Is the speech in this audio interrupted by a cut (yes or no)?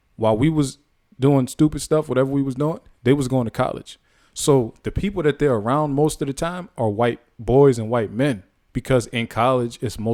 no